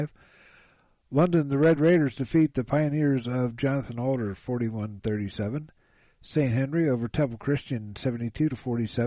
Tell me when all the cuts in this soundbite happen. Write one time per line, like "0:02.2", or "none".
none